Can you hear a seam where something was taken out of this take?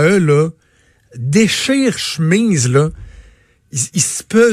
yes; 1 cut; at 2.0 s

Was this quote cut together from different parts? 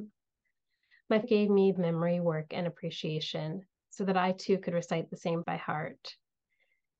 yes; 3 cuts; at 1.2 s, 1.8 s, 5.4 s

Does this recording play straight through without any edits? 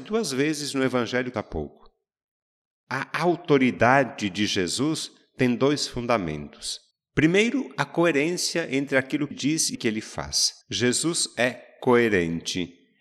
no; 5 cuts; at 1.3 s, 6.9 s, 9.3 s, 9.7 s, 10.6 s

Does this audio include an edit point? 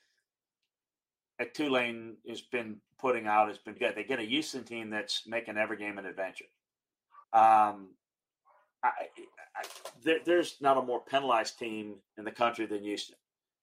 yes; 4 cuts; at 2.9 s, 3.8 s, 7.2 s, 12.1 s

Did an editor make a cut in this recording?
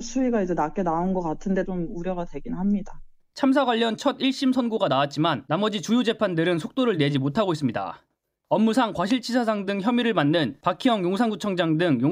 no; 0 cuts

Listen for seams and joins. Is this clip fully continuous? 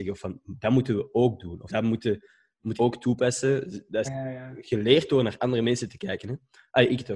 no; 3 cuts; at 1.7 s, 2.8 s, 4.0 s

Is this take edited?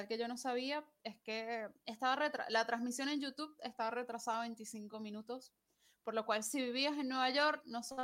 no; 0 cuts

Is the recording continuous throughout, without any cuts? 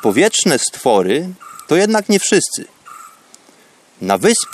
yes; 0 cuts

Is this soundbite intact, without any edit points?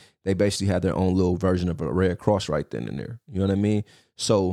yes; 0 cuts

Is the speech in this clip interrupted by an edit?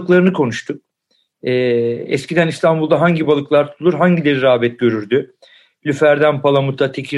no; 0 cuts

